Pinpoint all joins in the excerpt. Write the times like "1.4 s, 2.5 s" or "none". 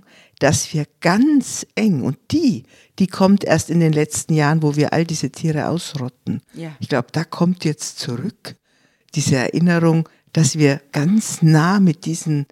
none